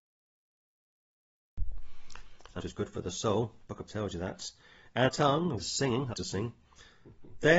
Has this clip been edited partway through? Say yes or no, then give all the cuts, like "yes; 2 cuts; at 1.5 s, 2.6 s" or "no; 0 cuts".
yes; 5 cuts; at 2.6 s, 3.9 s, 5.1 s, 5.6 s, 6.1 s